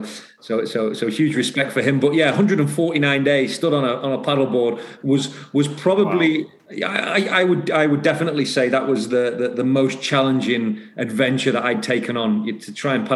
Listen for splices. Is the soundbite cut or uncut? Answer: uncut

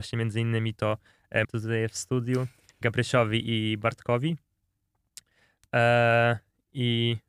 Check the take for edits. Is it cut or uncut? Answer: cut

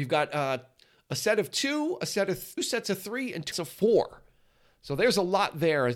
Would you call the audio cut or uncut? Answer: cut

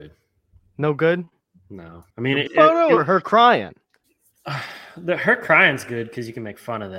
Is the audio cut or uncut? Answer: cut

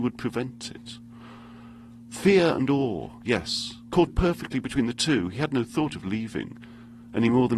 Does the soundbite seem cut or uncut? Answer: cut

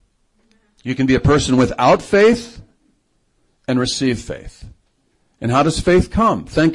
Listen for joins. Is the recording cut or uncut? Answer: uncut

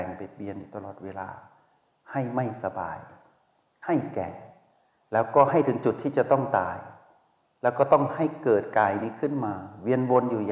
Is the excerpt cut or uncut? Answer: uncut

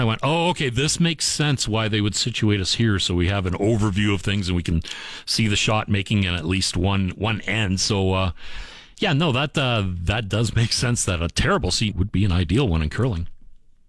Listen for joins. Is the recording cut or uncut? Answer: cut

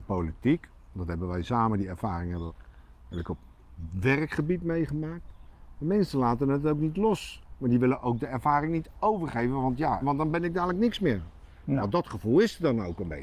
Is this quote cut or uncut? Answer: cut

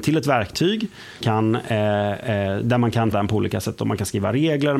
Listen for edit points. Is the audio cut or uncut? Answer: cut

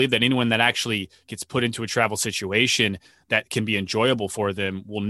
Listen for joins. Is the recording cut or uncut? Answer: uncut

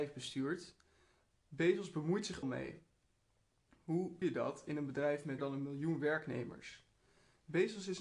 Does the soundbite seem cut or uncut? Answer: cut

